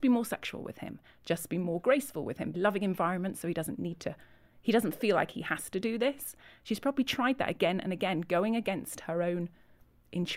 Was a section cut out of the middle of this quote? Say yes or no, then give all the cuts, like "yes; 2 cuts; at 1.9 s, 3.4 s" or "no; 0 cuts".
yes; 1 cut; at 2.5 s